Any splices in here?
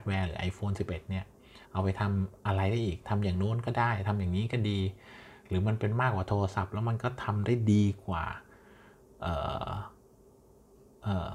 yes; 1 cut; at 1.6 s

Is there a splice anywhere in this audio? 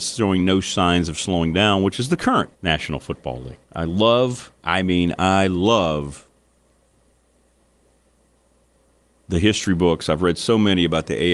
yes; 3 cuts; at 2.5 s, 3.6 s, 4.6 s

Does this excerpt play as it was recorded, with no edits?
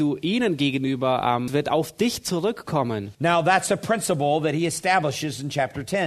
no; 2 cuts; at 1.5 s, 3.1 s

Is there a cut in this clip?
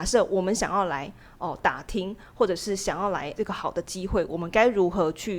yes; 1 cut; at 3.4 s

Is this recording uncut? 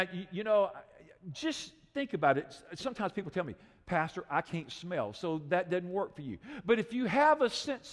yes; 0 cuts

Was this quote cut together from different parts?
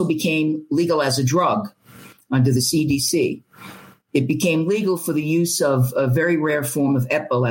no; 0 cuts

